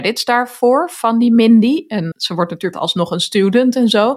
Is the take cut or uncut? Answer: cut